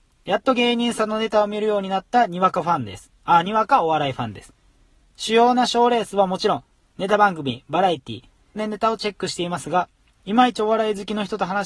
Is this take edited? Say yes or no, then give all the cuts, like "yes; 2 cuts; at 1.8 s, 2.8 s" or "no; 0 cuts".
yes; 1 cut; at 8.6 s